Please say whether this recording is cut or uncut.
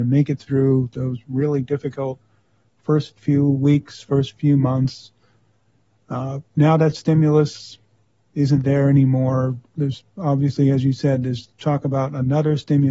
uncut